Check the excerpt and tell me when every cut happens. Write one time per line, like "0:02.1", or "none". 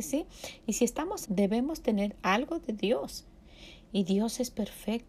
0:01.3